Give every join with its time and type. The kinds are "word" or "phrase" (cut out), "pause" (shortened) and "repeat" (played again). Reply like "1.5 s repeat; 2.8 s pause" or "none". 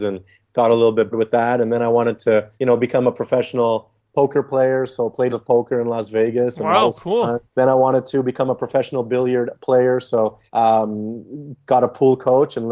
1.1 s word; 2.5 s pause; 5.3 s phrase; 7.5 s pause; 10.5 s pause